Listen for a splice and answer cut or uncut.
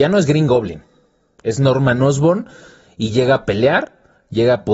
uncut